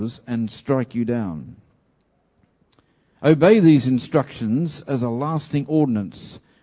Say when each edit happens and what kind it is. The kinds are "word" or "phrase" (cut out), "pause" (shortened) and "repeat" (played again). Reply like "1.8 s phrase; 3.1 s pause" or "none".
none